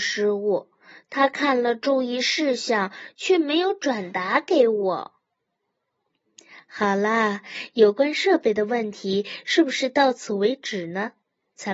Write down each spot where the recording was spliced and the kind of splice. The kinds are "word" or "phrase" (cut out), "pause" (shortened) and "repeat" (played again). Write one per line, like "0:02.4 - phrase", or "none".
none